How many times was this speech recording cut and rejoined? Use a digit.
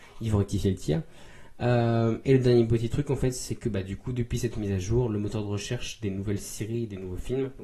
0